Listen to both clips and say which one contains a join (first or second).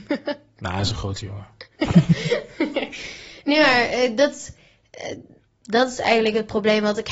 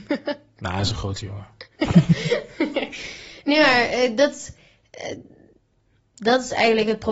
first